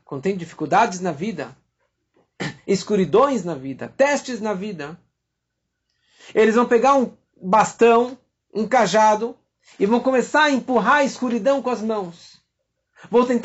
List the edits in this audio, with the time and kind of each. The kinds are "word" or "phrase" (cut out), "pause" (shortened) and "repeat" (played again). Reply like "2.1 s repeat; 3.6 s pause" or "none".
none